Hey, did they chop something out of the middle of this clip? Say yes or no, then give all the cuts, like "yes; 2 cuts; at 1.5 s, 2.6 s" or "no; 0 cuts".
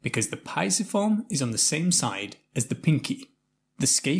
no; 0 cuts